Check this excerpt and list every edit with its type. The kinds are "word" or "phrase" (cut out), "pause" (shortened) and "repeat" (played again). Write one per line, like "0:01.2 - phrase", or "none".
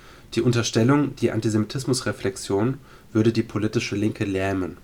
none

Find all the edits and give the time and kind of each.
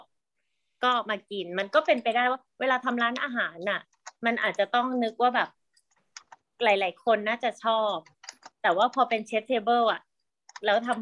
0:08.5 - pause

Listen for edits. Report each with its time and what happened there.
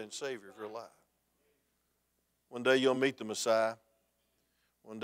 none

